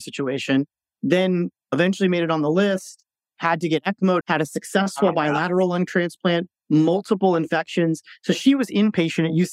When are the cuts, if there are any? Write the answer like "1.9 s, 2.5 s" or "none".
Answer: 4.2 s